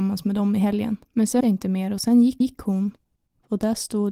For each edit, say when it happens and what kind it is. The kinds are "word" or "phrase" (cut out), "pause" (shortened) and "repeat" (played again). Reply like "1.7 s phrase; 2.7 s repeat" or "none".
1.0 s pause; 1.4 s word; 2.4 s repeat